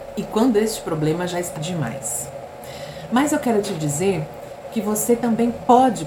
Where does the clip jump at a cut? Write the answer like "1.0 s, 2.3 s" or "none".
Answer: 1.6 s